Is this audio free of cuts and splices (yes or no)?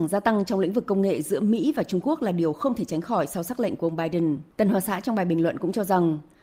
no